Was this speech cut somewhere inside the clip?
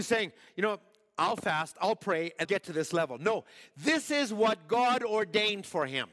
yes; 1 cut; at 2.4 s

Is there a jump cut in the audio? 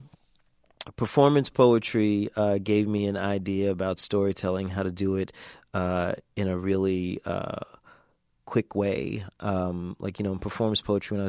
no; 0 cuts

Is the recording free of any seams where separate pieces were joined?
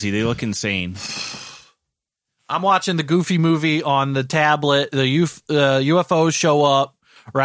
yes; 0 cuts

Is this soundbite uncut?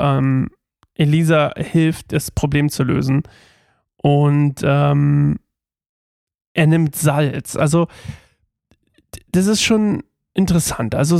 yes; 0 cuts

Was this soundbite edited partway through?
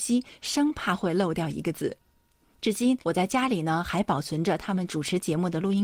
yes; 1 cut; at 3.0 s

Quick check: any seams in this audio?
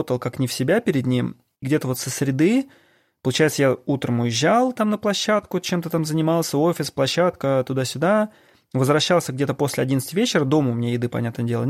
yes; 1 cut; at 1.6 s

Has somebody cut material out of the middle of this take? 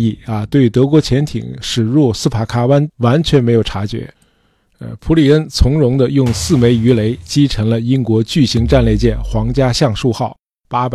no; 0 cuts

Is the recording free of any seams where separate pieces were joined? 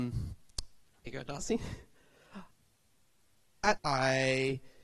no; 3 cuts; at 1.1 s, 2.5 s, 3.8 s

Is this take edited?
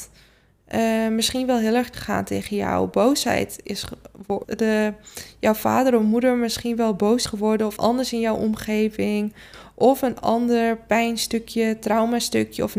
yes; 4 cuts; at 1.9 s, 4.4 s, 7.3 s, 7.8 s

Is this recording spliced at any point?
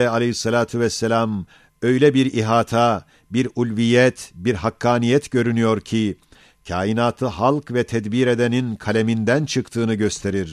no; 0 cuts

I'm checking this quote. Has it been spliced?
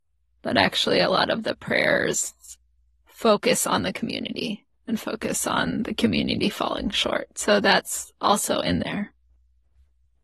no; 0 cuts

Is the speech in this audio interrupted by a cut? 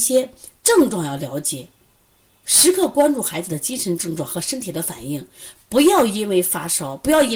no; 0 cuts

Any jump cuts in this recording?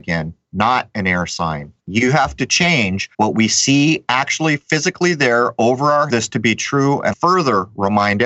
yes; 4 cuts; at 1.8 s, 3.1 s, 6.1 s, 7.1 s

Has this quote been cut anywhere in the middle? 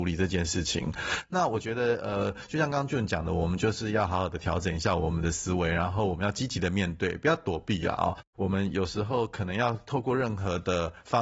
no; 0 cuts

